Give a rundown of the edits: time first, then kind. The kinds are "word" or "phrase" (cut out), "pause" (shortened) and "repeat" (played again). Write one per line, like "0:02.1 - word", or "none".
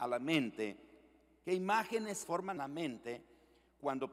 0:02.2 - word
0:02.6 - word